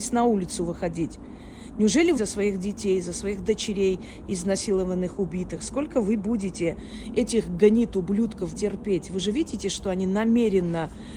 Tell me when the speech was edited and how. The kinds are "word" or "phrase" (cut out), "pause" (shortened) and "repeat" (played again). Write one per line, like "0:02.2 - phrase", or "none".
0:02.2 - phrase
0:08.5 - word